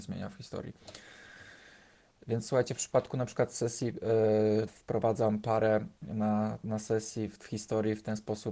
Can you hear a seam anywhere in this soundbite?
yes; 1 cut; at 4.7 s

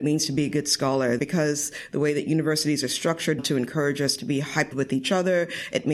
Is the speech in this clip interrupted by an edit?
yes; 3 cuts; at 1.2 s, 3.4 s, 4.7 s

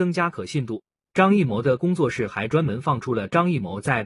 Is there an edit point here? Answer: no; 0 cuts

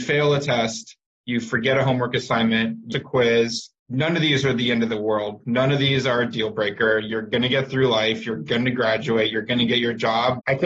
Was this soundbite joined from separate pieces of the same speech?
yes; 2 cuts; at 2.9 s, 3.8 s

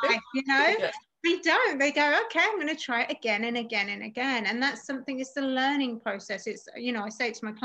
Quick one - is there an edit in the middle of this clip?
no; 0 cuts

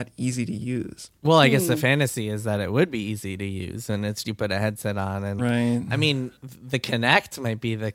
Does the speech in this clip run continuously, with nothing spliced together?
no; 4 cuts; at 1.2 s, 4.2 s, 5.4 s, 6.4 s

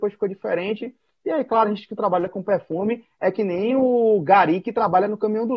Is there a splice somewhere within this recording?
no; 0 cuts

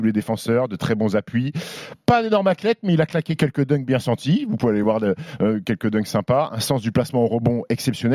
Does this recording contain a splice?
no; 0 cuts

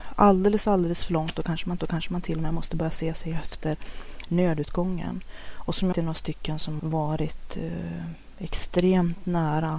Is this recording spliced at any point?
yes; 3 cuts; at 1.8 s, 5.9 s, 6.8 s

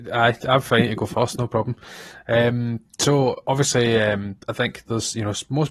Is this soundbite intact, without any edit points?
yes; 0 cuts

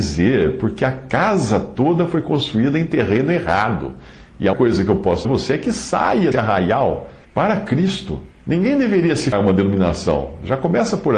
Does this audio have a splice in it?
yes; 6 cuts; at 4.5 s, 5.2 s, 6.3 s, 7.2 s, 8.3 s, 9.3 s

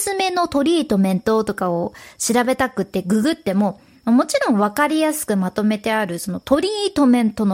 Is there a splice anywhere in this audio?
no; 0 cuts

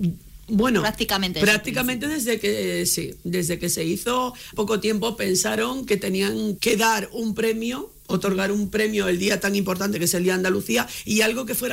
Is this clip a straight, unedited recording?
no; 2 cuts; at 4.5 s, 6.6 s

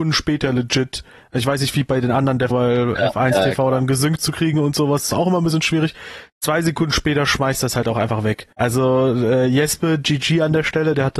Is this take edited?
yes; 2 cuts; at 2.5 s, 8.5 s

